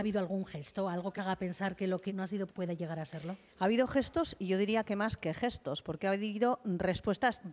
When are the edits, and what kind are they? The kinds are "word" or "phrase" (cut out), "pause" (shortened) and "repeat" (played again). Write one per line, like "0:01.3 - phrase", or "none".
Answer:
0:01.2 - word
0:02.1 - word
0:02.5 - word